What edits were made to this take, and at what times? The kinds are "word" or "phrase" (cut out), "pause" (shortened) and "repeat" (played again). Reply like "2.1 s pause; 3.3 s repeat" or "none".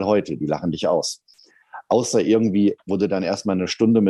2.8 s word

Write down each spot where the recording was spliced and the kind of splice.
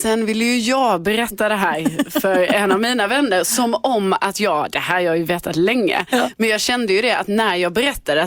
none

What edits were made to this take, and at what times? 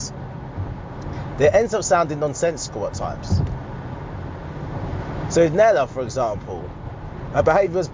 none

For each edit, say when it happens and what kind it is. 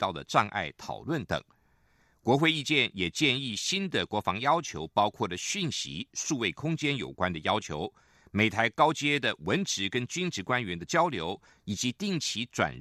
none

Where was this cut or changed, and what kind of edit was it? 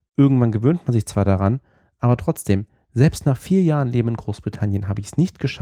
none

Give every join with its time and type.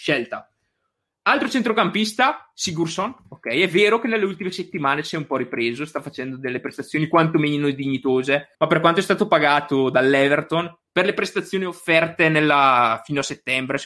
3.2 s pause; 8.5 s pause

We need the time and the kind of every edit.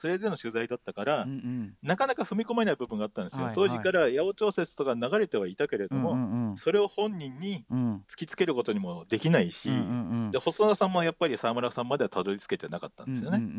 8.0 s pause

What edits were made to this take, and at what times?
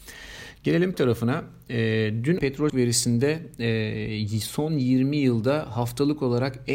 0.9 s word; 2.4 s phrase; 2.7 s word

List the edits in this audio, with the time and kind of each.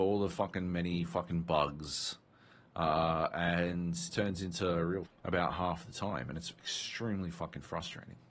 4.1 s phrase; 5.1 s phrase

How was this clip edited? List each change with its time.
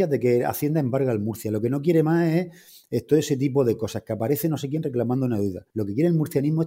5.7 s pause

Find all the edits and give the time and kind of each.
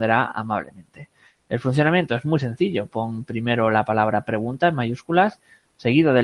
none

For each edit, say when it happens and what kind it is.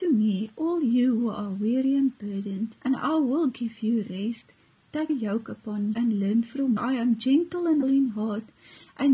2.8 s pause; 5.1 s word; 5.9 s word; 6.8 s phrase; 7.8 s word

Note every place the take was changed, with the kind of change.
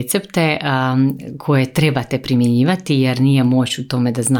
none

